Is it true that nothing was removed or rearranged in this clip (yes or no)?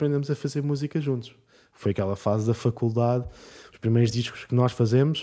yes